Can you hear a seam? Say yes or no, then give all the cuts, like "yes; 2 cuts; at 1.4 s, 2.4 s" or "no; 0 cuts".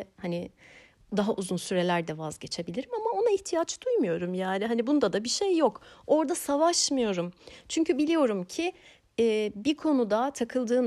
no; 0 cuts